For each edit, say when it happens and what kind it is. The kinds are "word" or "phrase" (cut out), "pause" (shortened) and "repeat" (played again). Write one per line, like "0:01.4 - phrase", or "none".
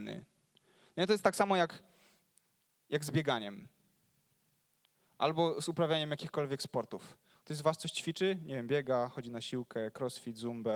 none